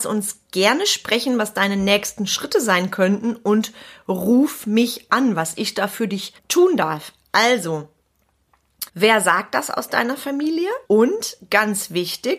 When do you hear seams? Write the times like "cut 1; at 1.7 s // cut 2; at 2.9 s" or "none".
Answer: cut 1; at 6.4 s // cut 2; at 8.9 s // cut 3; at 10.8 s